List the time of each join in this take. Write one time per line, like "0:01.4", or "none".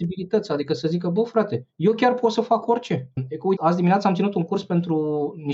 none